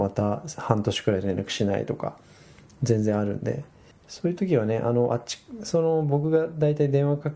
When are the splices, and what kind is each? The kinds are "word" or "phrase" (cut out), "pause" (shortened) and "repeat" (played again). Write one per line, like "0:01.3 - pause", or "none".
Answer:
0:03.9 - pause

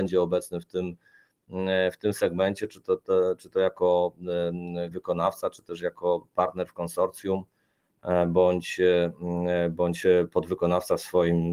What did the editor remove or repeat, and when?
0:04.9 - word

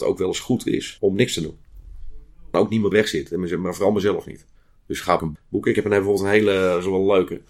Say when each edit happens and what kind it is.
0:01.0 - pause
0:02.5 - phrase
0:02.9 - phrase
0:04.6 - pause
0:05.2 - phrase
0:05.7 - phrase

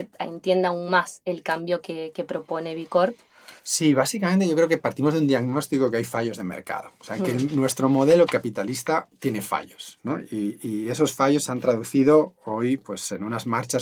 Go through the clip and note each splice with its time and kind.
0:03.6 - pause

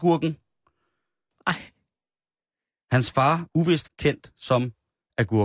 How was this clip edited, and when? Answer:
0:03.5 - word
0:03.9 - word

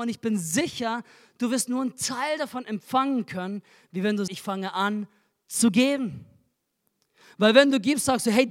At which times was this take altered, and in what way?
0:04.3 - word

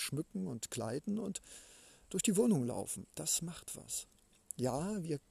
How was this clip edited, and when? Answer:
none

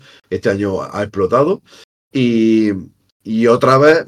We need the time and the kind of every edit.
none

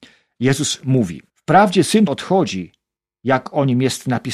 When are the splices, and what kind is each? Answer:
0:01.3 - pause
0:02.1 - word
0:03.0 - pause

